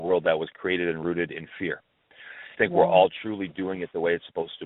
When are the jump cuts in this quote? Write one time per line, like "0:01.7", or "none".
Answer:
0:02.5